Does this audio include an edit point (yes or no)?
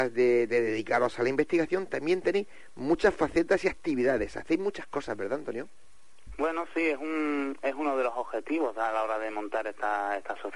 no